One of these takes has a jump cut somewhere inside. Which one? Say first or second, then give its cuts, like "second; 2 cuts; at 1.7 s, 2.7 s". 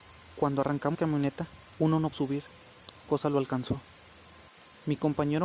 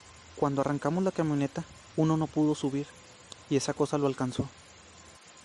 first; 3 cuts; at 0.9 s, 2.1 s, 3.1 s